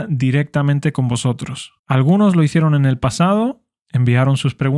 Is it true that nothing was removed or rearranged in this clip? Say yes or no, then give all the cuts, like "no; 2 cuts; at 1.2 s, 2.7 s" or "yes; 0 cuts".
no; 1 cut; at 1.8 s